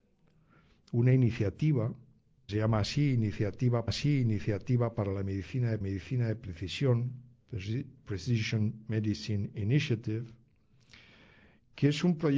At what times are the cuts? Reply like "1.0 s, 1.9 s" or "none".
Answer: 2.5 s, 3.9 s, 5.8 s

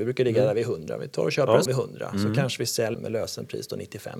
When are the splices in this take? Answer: 1.7 s, 2.9 s

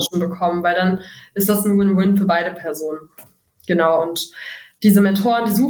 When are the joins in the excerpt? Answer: none

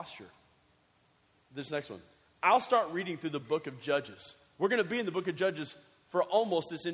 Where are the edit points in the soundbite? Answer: none

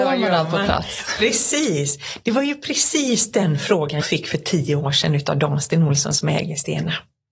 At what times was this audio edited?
4.0 s

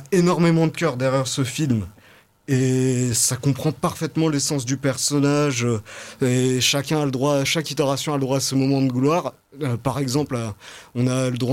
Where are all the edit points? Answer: none

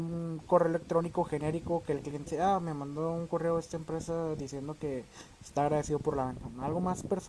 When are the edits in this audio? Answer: 2.3 s

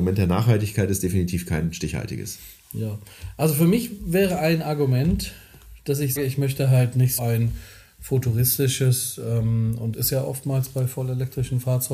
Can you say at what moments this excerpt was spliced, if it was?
6.2 s, 7.2 s, 9.9 s

